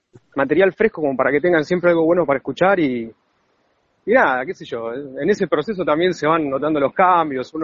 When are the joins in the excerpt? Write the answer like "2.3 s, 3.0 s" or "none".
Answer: none

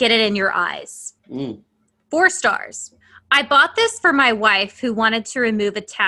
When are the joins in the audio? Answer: 1.2 s, 3.0 s

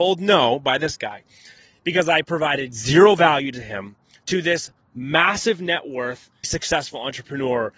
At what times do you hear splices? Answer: 6.4 s

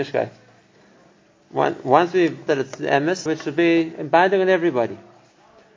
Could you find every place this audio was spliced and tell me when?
2.5 s, 3.3 s

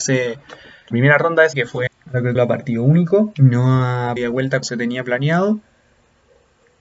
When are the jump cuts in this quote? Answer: 0.9 s, 1.5 s, 1.9 s, 2.3 s, 4.2 s, 4.6 s

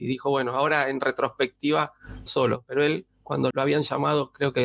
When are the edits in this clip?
2.3 s, 3.5 s

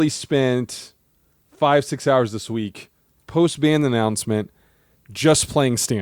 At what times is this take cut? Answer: none

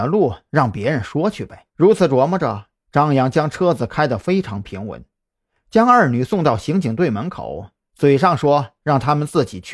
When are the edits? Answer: 1.7 s

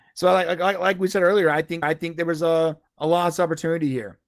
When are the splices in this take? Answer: 1.8 s, 2.9 s

